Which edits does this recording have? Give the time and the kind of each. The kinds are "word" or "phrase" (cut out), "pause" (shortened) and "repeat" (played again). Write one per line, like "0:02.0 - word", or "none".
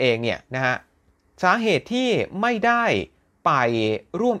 none